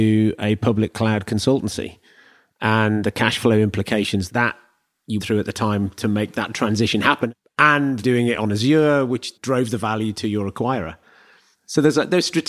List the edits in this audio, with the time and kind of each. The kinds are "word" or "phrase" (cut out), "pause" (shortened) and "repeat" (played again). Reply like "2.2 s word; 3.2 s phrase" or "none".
4.3 s word; 5.2 s word; 8.0 s word; 9.4 s word